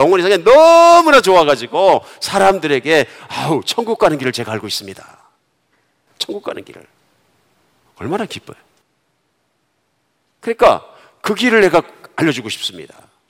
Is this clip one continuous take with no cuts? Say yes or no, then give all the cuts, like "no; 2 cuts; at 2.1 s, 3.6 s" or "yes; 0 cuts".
yes; 0 cuts